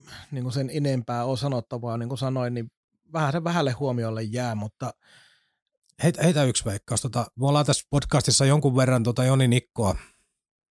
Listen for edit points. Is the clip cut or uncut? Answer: uncut